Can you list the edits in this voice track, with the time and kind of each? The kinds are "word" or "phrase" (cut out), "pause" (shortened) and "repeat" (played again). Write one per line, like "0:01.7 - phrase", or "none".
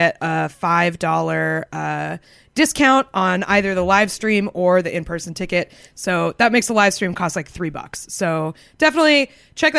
none

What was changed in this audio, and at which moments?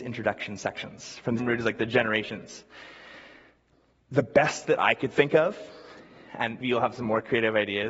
0:01.4 - word
0:06.6 - word

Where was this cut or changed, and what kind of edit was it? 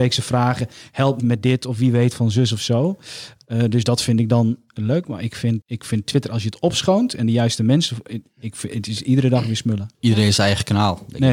0:01.2 - word
0:05.6 - word
0:09.9 - pause

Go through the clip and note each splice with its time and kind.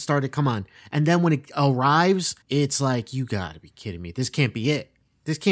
0:02.4 - pause

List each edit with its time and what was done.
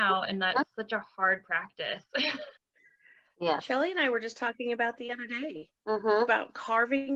0:02.6 - pause
0:05.0 - word
0:05.8 - pause

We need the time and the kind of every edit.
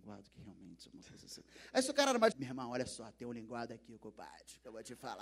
0:02.3 - word

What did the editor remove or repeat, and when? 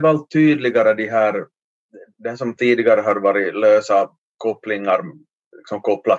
none

